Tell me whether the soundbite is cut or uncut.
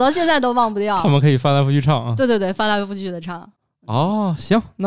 uncut